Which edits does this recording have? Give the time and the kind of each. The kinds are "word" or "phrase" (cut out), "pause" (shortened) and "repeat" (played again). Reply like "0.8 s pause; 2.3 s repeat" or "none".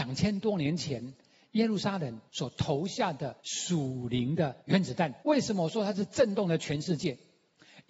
2.3 s pause; 3.4 s pause; 4.6 s pause; 5.2 s pause